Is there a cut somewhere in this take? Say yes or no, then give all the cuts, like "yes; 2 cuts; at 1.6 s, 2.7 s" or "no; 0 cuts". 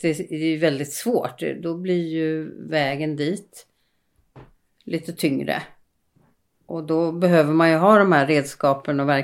no; 0 cuts